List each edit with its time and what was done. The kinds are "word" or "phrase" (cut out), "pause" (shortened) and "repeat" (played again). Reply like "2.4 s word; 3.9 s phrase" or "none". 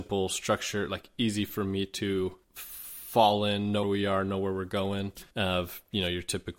2.4 s pause; 3.8 s word; 5.3 s pause